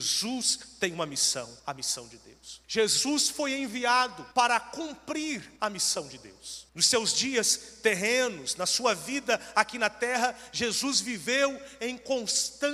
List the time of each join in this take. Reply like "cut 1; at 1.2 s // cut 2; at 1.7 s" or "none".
cut 1; at 1.6 s // cut 2; at 2.6 s // cut 3; at 4.3 s // cut 4; at 5.6 s // cut 5; at 6.7 s

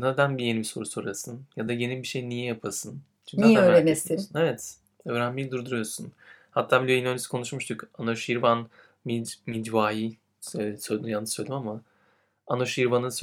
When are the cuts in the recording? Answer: none

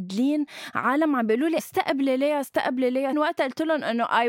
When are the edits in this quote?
cut 1; at 1.6 s // cut 2; at 3.1 s

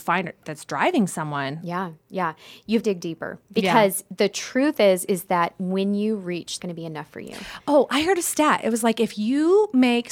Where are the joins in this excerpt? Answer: cut 1; at 2.0 s // cut 2; at 2.8 s // cut 3; at 6.6 s

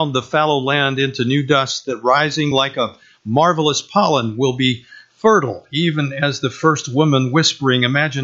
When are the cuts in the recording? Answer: none

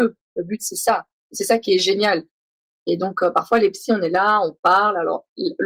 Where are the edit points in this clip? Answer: none

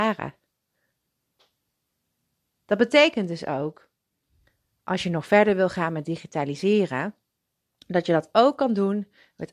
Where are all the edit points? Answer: none

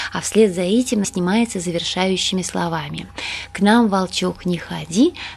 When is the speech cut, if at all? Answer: cut 1; at 1.0 s

